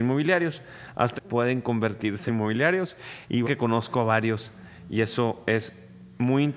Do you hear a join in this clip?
yes; 3 cuts; at 1.2 s, 2.3 s, 3.4 s

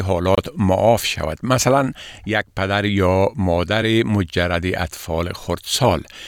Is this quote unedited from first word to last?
yes; 0 cuts

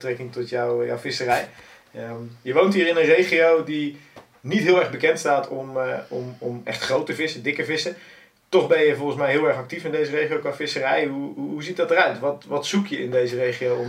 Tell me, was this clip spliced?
no; 0 cuts

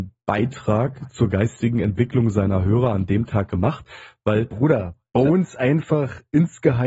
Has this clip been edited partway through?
no; 0 cuts

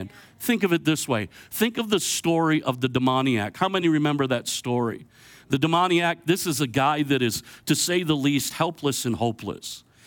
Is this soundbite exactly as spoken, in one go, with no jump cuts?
yes; 0 cuts

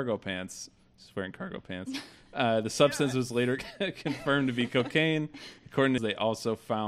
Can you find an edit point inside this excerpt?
yes; 1 cut; at 6.0 s

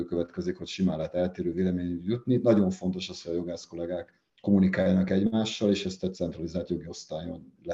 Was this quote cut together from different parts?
no; 0 cuts

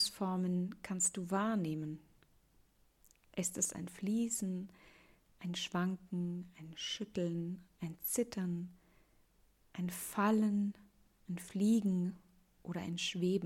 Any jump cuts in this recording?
no; 0 cuts

